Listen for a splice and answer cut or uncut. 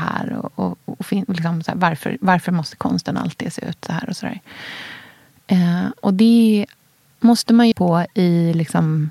cut